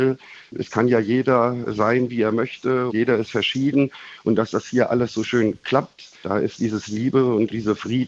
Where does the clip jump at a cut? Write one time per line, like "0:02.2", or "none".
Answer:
0:02.9
0:06.2

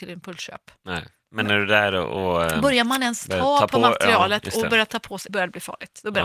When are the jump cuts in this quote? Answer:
0:05.3

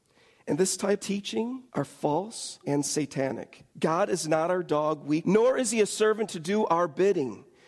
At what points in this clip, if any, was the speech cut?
0:01.0
0:01.7
0:02.6
0:03.7
0:05.2

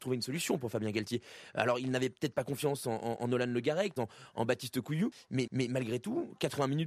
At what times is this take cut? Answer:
0:04.0
0:05.5

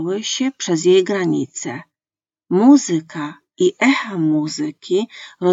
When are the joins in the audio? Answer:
none

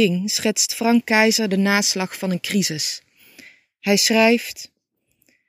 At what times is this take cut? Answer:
none

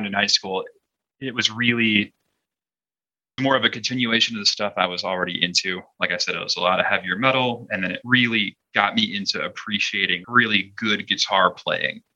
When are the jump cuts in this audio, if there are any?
0:03.4
0:10.2

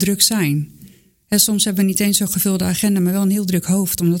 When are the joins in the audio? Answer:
none

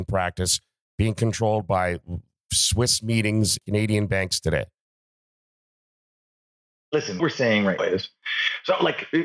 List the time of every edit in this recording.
0:03.6
0:07.2
0:07.8

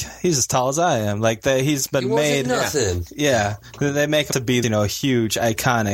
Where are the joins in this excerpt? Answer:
0:04.3
0:04.6

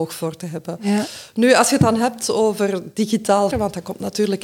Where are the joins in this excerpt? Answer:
0:03.5

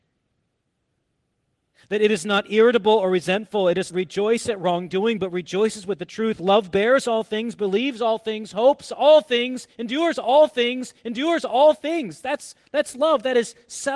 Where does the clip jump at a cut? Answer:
0:03.9
0:10.5

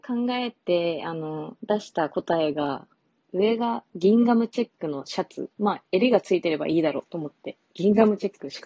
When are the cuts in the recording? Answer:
0:01.6
0:03.1
0:05.5
0:05.9

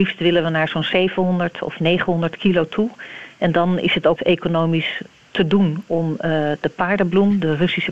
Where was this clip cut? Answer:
0:04.2

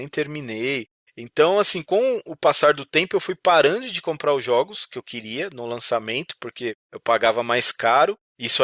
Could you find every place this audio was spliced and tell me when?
none

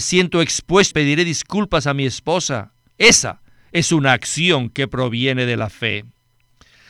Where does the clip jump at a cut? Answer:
0:00.9
0:02.9

